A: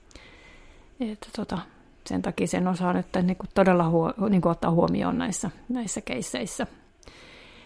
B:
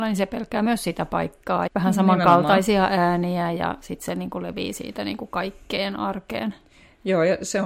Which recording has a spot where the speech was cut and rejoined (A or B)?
B